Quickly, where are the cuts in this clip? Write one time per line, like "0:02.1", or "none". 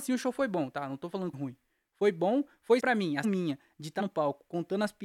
0:01.3
0:02.8
0:03.2
0:04.0